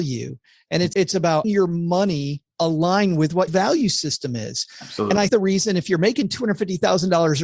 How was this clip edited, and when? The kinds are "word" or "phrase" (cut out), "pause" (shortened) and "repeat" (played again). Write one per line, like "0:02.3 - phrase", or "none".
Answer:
0:00.9 - word
0:01.4 - word
0:03.5 - word
0:05.3 - word